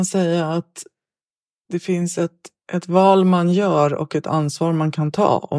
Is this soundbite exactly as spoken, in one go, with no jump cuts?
yes; 0 cuts

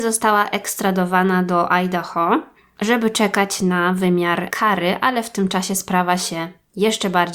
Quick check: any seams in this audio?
no; 0 cuts

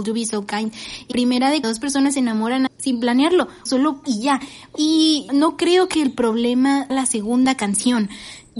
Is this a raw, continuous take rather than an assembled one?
no; 8 cuts; at 1.1 s, 1.6 s, 2.7 s, 3.7 s, 4.0 s, 4.7 s, 5.3 s, 6.9 s

